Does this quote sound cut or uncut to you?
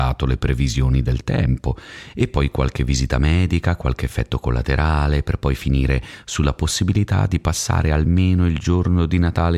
uncut